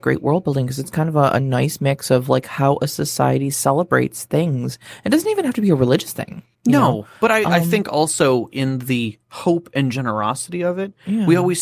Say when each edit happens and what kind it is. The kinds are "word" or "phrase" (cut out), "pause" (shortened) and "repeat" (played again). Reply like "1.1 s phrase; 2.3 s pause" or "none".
6.5 s pause; 7.2 s pause